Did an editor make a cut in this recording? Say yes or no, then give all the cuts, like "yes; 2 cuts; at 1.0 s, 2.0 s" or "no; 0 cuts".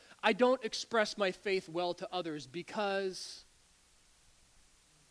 no; 0 cuts